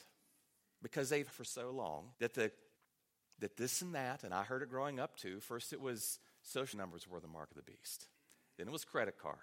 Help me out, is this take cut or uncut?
cut